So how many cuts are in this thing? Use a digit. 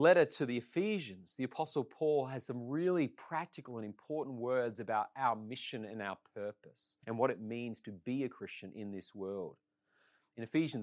1